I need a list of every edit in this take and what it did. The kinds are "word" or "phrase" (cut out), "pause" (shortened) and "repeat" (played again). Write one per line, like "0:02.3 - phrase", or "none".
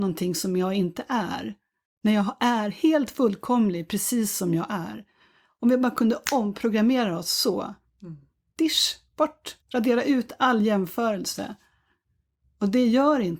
0:09.6 - pause